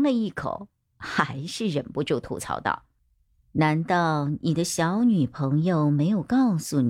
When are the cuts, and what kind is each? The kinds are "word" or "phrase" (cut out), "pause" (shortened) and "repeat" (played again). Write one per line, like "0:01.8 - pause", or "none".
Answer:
none

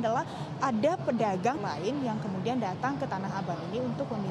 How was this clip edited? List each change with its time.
0:01.6 - phrase

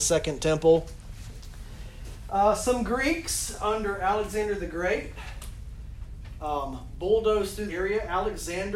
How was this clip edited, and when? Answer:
0:07.7 - word

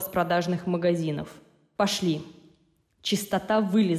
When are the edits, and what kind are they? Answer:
none

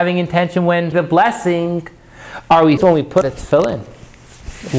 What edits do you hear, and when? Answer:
0:00.9 - word
0:02.8 - word
0:03.2 - word

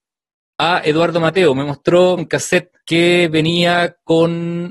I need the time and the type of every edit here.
0:02.2 - phrase
0:02.8 - pause

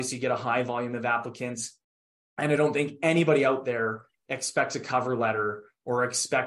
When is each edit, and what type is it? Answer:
none

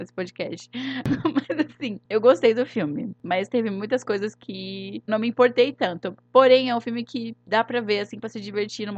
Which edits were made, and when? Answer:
0:05.1 - word

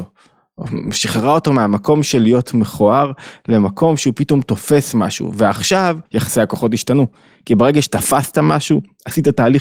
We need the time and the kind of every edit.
0:06.1 - pause

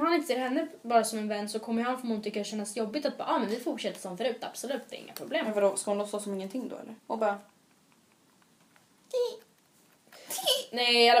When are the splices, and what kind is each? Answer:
0:07.0 - pause

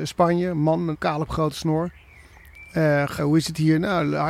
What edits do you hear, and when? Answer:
0:00.9 - word
0:01.3 - word
0:03.2 - word

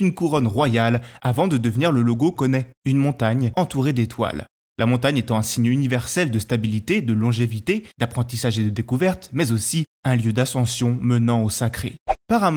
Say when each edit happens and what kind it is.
0:02.3 - word
0:07.9 - pause

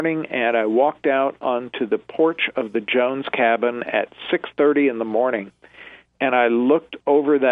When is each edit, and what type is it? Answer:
none

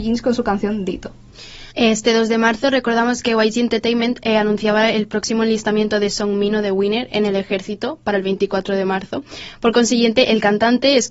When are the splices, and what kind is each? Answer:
0:01.7 - pause

